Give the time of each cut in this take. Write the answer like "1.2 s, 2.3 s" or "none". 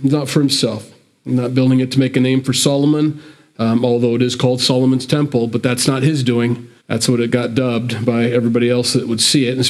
6.8 s

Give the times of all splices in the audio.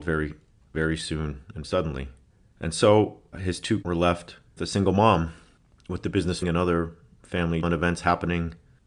1.6 s, 3.3 s, 3.8 s, 4.6 s, 6.4 s, 7.6 s

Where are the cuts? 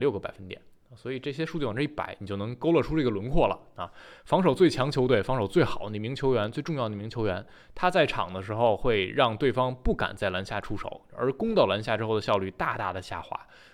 none

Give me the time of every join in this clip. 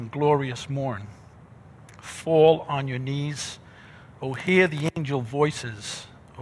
none

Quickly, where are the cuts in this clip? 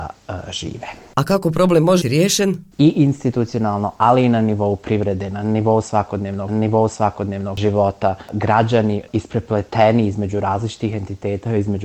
2.0 s, 2.7 s, 6.5 s

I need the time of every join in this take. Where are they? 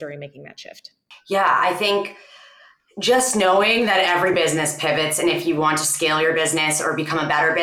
none

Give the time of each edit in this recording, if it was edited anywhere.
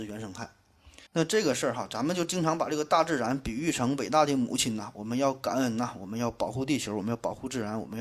1.1 s

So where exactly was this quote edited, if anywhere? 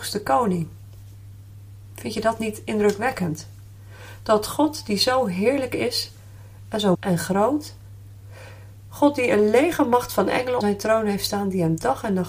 6.9 s, 10.6 s

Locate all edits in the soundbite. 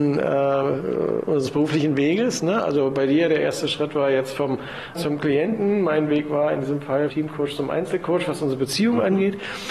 5.0 s, 7.1 s

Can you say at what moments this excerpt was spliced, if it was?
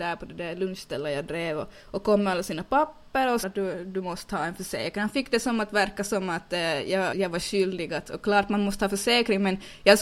1.8 s, 3.4 s, 7.1 s

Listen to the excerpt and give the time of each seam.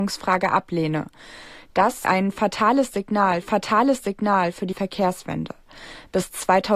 2.0 s, 3.4 s, 4.7 s

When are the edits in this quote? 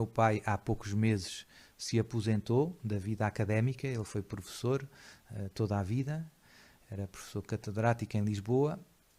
none

